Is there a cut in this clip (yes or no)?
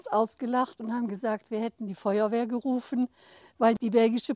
no